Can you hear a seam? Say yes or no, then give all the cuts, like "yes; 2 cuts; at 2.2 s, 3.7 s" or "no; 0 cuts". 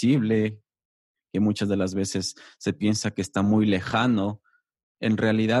no; 0 cuts